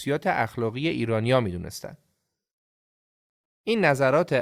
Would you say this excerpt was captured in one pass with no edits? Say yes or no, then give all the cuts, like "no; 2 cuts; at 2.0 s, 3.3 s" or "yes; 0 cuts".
yes; 0 cuts